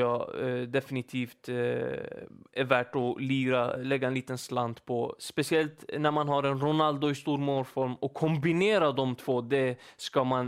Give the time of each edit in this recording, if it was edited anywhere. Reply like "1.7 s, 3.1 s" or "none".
none